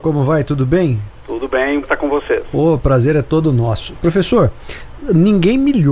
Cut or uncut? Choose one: cut